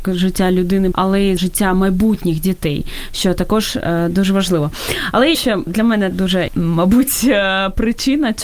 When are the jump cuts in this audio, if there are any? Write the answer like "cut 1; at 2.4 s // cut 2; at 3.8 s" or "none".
cut 1; at 0.9 s // cut 2; at 1.4 s // cut 3; at 5.3 s // cut 4; at 5.7 s // cut 5; at 6.1 s // cut 6; at 6.5 s